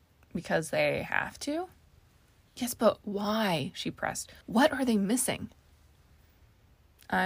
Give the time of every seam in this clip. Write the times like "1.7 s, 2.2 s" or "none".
4.4 s